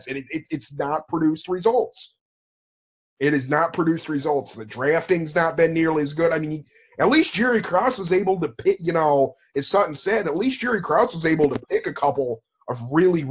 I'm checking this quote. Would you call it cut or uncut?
uncut